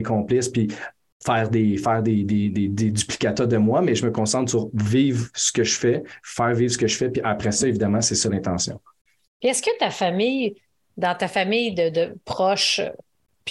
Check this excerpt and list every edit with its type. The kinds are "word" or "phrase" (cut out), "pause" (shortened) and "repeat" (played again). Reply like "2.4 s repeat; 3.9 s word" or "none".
none